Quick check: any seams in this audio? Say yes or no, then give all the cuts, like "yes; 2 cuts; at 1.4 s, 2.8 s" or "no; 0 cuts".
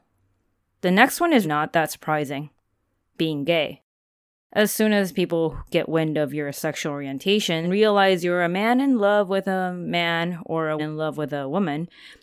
yes; 3 cuts; at 1.4 s, 7.6 s, 10.8 s